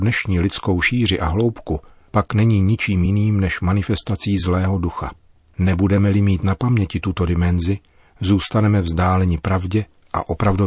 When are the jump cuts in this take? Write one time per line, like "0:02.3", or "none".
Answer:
none